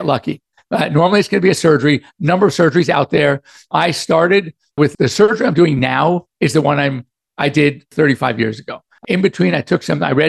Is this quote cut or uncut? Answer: uncut